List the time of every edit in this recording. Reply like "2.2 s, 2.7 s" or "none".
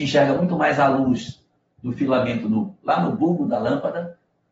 none